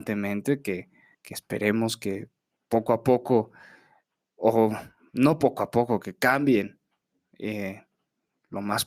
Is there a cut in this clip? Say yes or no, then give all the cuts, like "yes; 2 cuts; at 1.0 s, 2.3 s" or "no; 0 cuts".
yes; 1 cut; at 1.1 s